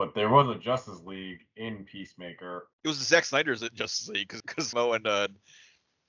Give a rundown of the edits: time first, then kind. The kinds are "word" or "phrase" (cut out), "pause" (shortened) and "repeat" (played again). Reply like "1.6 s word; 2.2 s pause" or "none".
2.7 s pause; 4.4 s word; 4.7 s phrase